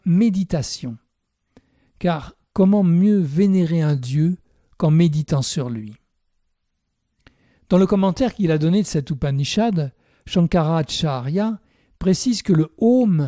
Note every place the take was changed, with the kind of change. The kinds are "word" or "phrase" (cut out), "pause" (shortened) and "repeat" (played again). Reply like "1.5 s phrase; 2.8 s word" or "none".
none